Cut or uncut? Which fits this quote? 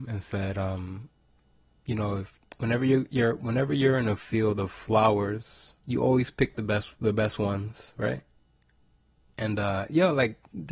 cut